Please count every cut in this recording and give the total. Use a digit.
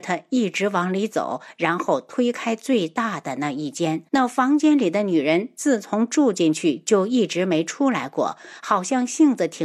1